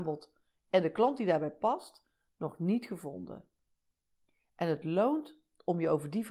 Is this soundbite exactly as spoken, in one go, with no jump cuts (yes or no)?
yes